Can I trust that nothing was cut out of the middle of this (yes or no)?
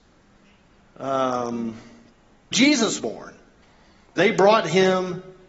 no